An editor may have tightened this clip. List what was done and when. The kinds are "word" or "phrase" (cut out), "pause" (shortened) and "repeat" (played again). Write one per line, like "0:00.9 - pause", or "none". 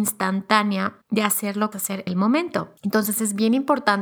0:01.0 - pause
0:01.7 - phrase
0:02.1 - word
0:02.8 - pause

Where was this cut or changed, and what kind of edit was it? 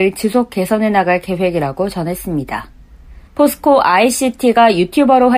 0:03.3 - pause

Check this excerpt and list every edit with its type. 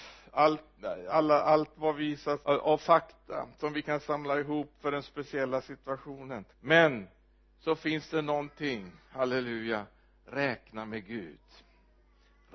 0:02.4 - phrase
0:06.5 - pause

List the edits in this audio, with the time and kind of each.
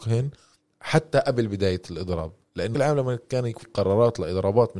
0:02.7 - word
0:03.6 - word

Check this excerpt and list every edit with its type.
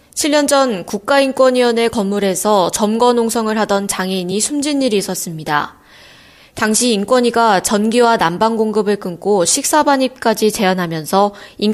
none

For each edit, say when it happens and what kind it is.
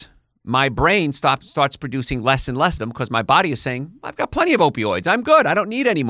0:02.8 - word

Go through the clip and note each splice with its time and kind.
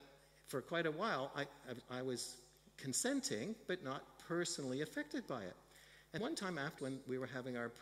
0:06.2 - word
0:06.8 - phrase

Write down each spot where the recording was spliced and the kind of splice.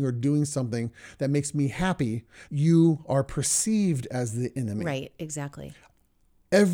0:02.5 - word

